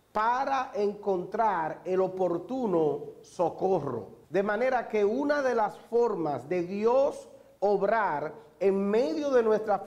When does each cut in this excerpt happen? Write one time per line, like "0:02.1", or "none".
0:04.2